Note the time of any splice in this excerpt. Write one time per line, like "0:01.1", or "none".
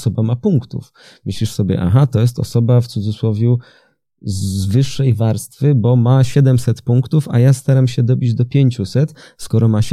none